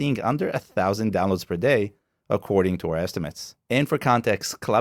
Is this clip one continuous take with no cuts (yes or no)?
yes